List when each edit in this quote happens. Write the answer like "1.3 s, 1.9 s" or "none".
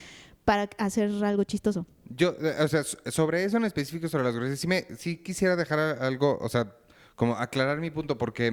none